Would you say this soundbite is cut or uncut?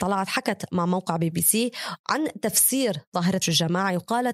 cut